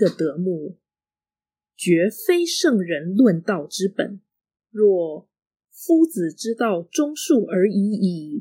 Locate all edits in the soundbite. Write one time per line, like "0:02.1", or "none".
0:04.4